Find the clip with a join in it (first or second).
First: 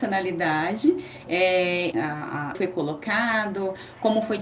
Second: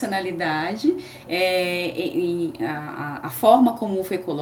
first